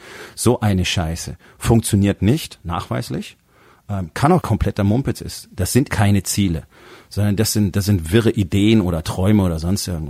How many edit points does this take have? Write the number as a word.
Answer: two